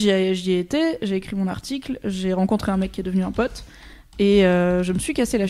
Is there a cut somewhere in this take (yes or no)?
no